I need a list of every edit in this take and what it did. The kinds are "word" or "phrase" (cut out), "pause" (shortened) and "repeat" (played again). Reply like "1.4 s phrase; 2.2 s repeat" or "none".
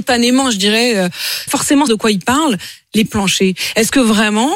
1.5 s word; 1.9 s word; 3.1 s word